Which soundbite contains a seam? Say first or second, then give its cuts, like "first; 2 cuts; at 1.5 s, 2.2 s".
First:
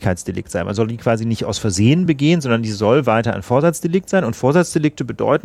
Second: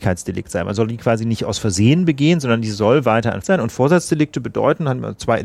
second; 1 cut; at 3.4 s